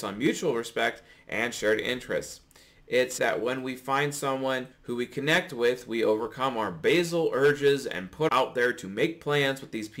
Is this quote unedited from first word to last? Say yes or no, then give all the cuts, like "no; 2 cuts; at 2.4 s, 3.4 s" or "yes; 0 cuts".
no; 3 cuts; at 3.2 s, 4.7 s, 8.3 s